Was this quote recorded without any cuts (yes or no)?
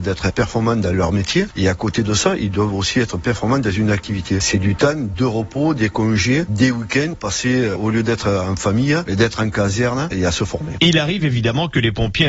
yes